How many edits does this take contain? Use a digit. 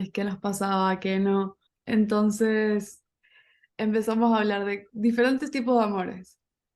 1